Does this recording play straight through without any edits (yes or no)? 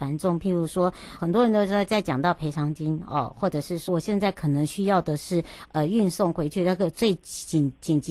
no